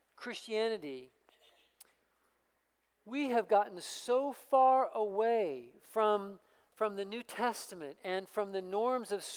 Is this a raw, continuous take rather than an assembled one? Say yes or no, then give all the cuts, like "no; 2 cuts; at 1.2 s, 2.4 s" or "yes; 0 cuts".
yes; 0 cuts